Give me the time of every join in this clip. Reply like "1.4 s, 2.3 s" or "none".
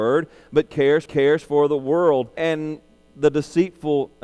1.1 s, 2.4 s